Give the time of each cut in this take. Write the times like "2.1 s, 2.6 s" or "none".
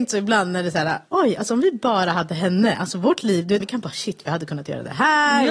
1.1 s, 3.6 s